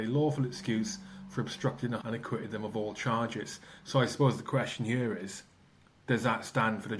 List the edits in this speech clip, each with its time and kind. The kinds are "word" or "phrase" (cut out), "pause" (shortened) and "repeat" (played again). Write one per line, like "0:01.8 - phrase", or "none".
0:02.0 - word